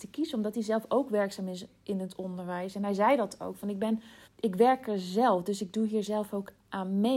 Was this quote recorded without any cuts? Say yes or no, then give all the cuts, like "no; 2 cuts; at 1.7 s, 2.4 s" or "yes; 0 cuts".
no; 1 cut; at 4.2 s